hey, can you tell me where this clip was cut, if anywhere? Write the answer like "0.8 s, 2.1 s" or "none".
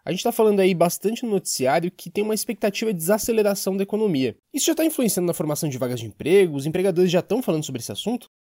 4.4 s